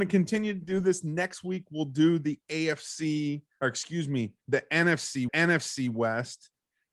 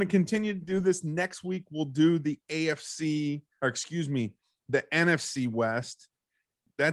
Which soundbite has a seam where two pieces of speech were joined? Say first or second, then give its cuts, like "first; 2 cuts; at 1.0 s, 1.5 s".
first; 2 cuts; at 4.4 s, 5.3 s